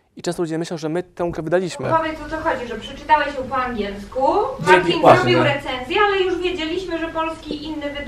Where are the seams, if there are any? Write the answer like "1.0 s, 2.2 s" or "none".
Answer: 1.4 s